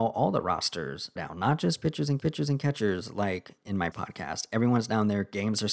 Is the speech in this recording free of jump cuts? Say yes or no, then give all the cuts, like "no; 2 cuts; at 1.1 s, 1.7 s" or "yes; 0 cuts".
no; 3 cuts; at 1.2 s, 2.2 s, 3.9 s